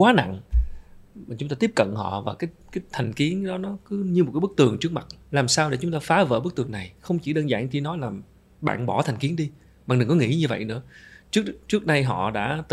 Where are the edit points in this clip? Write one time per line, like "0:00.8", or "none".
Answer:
0:05.2